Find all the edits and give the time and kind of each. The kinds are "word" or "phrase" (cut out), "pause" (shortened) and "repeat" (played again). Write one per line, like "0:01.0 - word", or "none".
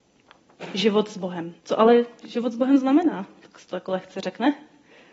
0:01.6 - pause